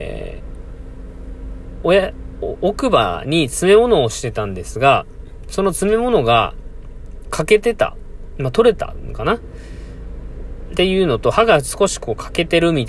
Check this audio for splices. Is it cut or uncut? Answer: uncut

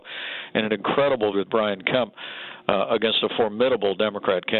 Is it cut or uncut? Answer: cut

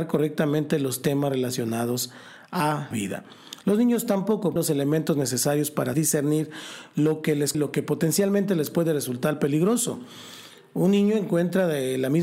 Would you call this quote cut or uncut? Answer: cut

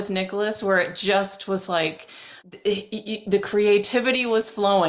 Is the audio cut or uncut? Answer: cut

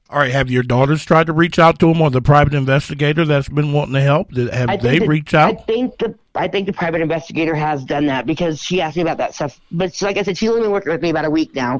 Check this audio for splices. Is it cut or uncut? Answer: uncut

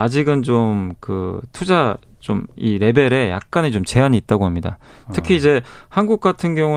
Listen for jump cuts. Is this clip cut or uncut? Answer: uncut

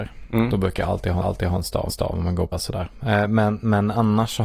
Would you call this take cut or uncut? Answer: cut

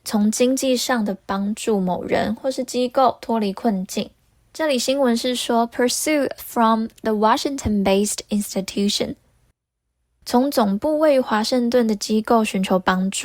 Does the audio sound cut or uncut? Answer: cut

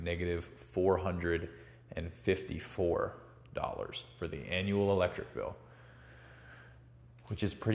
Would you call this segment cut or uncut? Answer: uncut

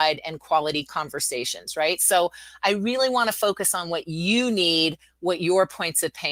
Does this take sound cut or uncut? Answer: uncut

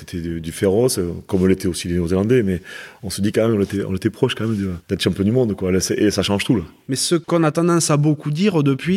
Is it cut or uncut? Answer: cut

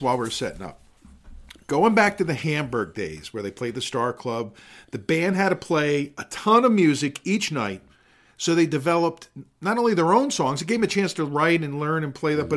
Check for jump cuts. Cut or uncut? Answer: uncut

